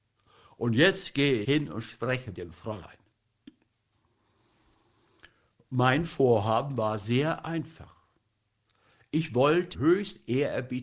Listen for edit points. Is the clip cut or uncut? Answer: cut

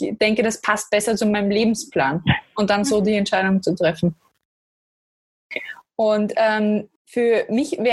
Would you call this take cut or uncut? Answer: cut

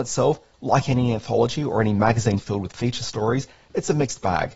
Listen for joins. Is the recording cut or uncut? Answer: uncut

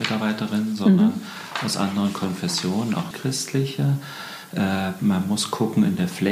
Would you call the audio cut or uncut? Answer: cut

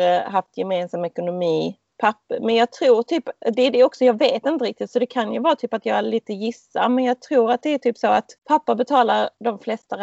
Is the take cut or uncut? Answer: cut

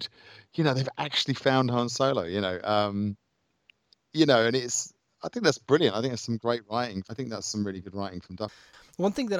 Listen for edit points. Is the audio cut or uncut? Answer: uncut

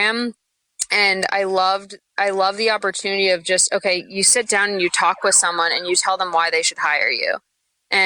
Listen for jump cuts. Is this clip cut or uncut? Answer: uncut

